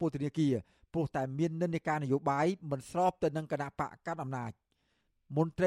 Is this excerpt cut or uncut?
uncut